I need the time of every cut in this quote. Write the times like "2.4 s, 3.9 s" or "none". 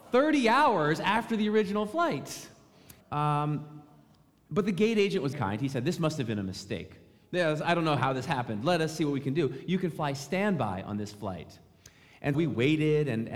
3.0 s, 5.3 s, 12.3 s